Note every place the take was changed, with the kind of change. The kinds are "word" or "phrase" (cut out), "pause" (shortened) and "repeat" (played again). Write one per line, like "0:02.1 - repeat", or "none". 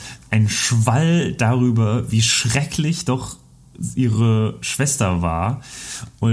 none

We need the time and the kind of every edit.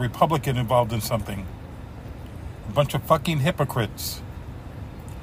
none

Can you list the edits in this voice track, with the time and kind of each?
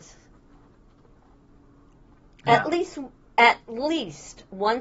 none

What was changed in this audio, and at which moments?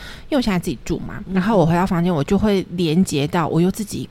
0:01.3 - word

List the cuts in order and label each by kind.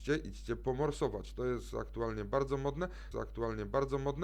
0:03.1 - repeat

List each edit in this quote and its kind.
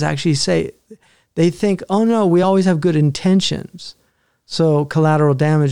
none

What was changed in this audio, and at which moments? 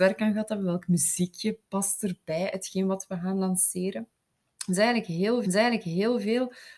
0:05.4 - repeat

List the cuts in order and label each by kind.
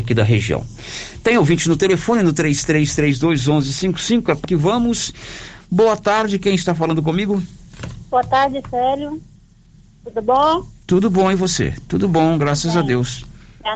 0:04.4 - word

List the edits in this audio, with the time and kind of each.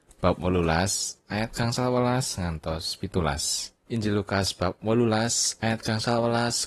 0:03.8 - pause

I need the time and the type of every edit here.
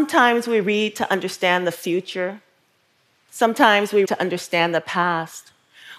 0:04.1 - word

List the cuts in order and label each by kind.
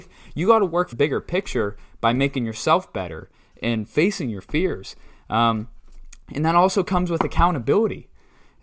0:00.9 - word

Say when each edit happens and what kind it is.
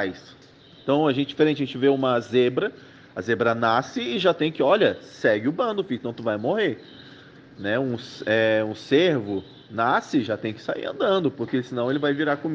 none

